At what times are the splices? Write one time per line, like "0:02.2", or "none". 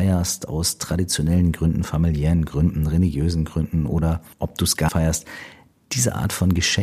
0:04.3
0:04.9